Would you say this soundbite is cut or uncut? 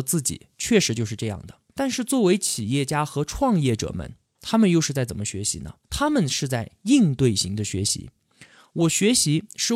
cut